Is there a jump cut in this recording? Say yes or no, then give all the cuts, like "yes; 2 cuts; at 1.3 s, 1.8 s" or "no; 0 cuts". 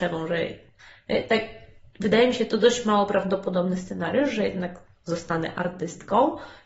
no; 0 cuts